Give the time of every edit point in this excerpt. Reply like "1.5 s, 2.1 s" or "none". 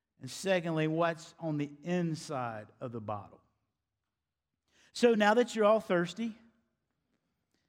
none